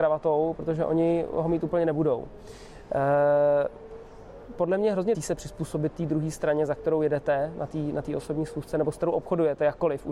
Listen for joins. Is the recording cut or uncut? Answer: cut